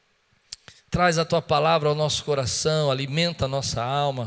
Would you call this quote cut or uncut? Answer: uncut